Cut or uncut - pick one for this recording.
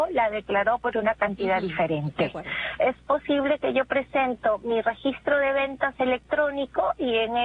uncut